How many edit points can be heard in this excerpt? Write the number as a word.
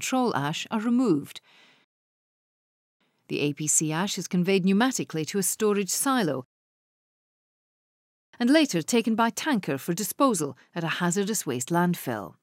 zero